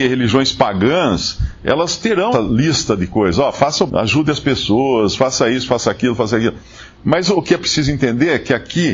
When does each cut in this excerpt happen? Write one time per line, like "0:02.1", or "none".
0:02.3
0:03.9